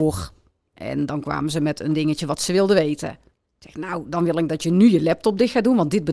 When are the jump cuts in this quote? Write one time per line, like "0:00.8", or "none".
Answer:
none